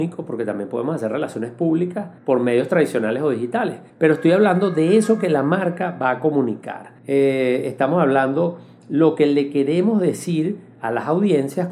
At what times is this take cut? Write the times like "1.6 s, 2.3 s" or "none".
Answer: 2.2 s, 3.9 s, 7.0 s